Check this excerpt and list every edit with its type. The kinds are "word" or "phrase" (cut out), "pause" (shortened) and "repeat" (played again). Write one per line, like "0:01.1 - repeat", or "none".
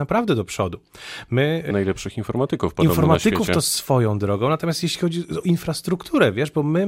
0:01.7 - word
0:05.4 - word

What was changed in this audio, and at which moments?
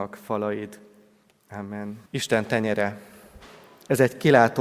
0:02.1 - pause

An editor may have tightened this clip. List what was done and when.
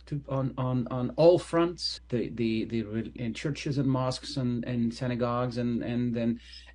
0:02.0 - word
0:03.2 - phrase

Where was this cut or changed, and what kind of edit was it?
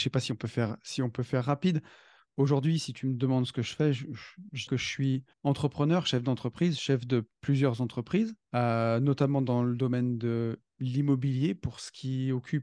0:04.7 - word
0:05.3 - pause
0:08.4 - pause

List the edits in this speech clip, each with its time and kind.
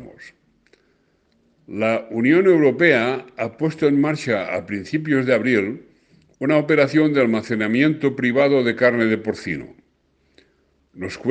none

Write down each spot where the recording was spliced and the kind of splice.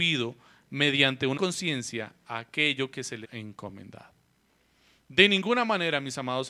0:01.4 - word
0:03.2 - word

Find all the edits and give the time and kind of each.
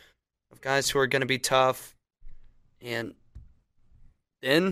none

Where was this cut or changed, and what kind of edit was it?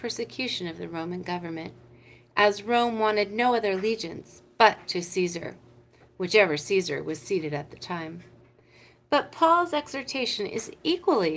none

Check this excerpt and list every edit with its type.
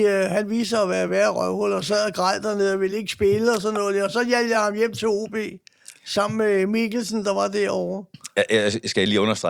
none

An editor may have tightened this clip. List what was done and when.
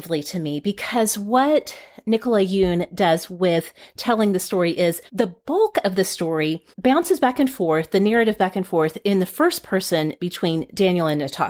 0:05.1 - pause
0:06.7 - pause
0:08.4 - word

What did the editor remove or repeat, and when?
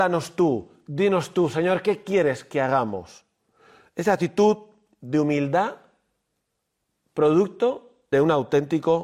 0:08.1 - word

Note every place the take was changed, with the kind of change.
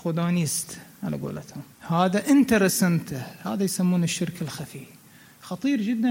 0:01.7 - pause

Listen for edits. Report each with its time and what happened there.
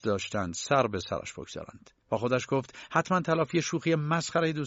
0:02.0 - pause

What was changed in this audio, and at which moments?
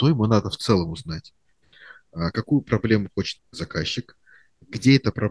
0:03.4 - word

